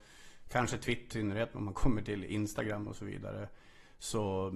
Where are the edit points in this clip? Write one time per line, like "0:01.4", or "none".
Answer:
0:01.1
0:01.5